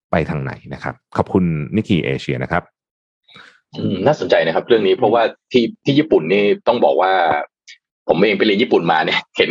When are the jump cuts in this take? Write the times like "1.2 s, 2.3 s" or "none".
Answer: none